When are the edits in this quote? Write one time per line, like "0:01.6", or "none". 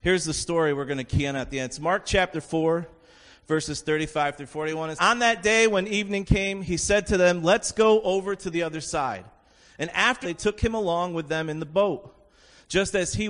0:05.0
0:10.2